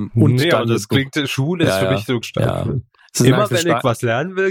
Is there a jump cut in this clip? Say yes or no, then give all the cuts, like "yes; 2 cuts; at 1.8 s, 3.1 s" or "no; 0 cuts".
yes; 1 cut; at 2.2 s